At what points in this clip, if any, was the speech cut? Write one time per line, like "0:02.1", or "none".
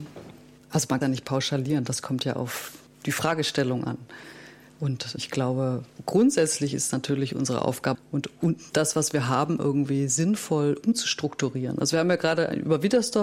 0:01.0
0:02.9
0:05.2
0:07.9

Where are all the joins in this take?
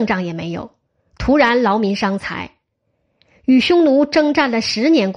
none

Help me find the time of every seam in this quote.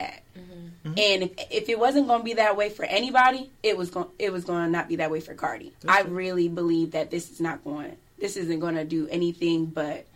0:03.6
0:05.7
0:08.1

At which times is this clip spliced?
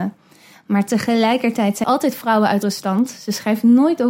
0:01.8
0:02.6

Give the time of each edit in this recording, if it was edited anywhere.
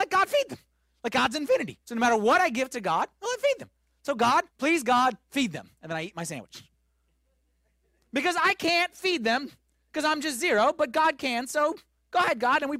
0:01.8
0:04.5

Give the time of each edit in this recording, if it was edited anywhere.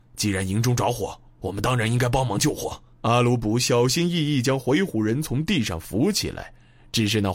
0:02.9

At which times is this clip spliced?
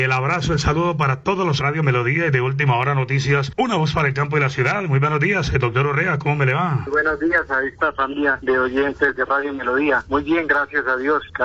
0:01.6

